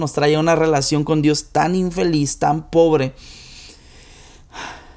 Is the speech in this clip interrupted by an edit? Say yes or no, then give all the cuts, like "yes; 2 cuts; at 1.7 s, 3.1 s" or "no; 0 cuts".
no; 0 cuts